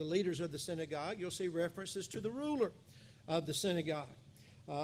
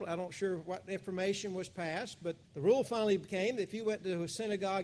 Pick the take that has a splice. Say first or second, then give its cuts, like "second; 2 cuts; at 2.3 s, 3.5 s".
second; 1 cut; at 2.4 s